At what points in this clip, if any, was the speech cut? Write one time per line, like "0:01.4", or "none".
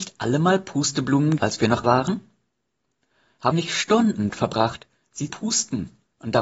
0:01.4
0:01.8
0:03.5
0:04.3
0:05.3